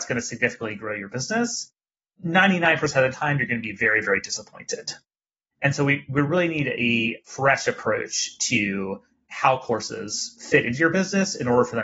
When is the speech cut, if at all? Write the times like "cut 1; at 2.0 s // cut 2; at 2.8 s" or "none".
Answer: none